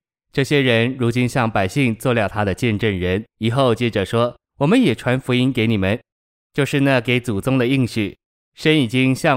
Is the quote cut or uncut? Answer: cut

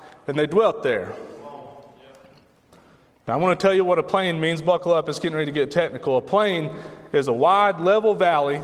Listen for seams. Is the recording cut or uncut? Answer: uncut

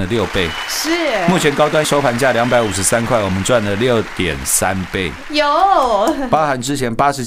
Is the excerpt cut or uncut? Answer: cut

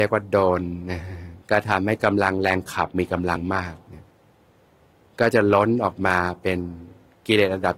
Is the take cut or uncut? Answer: cut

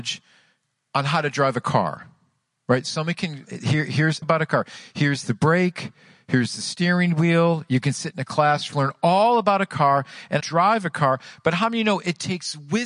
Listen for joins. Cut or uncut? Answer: cut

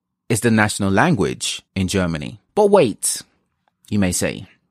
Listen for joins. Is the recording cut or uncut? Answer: cut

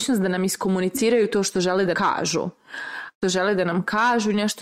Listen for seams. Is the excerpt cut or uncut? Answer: cut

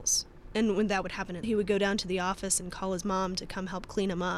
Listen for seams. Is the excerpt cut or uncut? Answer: cut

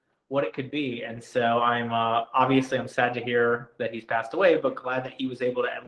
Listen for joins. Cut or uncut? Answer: uncut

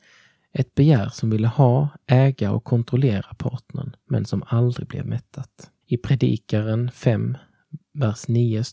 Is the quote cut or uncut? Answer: cut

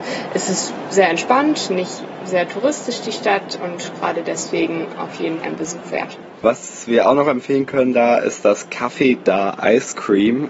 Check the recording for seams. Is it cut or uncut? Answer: cut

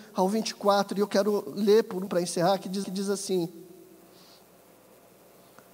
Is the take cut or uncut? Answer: cut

